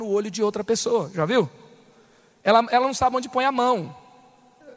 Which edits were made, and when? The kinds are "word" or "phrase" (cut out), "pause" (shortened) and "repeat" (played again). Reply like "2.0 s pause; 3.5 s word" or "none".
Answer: none